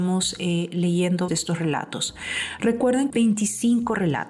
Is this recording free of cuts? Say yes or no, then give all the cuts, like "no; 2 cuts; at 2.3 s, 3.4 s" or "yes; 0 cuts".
no; 2 cuts; at 1.3 s, 3.1 s